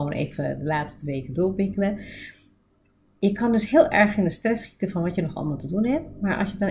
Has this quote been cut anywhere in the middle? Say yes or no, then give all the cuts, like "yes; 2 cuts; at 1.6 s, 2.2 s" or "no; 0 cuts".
no; 0 cuts